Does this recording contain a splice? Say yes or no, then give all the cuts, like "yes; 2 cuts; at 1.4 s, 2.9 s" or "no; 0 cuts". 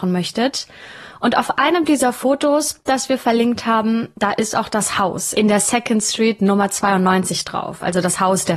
no; 0 cuts